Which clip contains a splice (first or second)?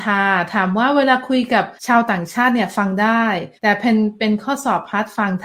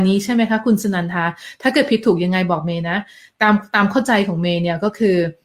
first